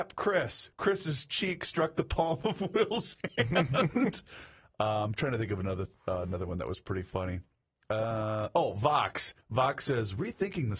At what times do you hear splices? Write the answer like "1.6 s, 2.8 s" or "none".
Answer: 9.4 s